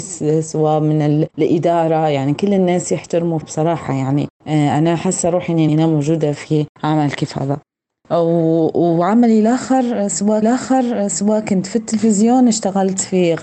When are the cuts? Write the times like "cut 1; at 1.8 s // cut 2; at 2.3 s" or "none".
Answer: cut 1; at 1.3 s // cut 2; at 3.4 s // cut 3; at 4.4 s // cut 4; at 5.7 s // cut 5; at 6.7 s // cut 6; at 10.4 s